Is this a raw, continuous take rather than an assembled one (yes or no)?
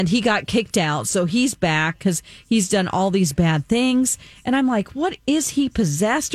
yes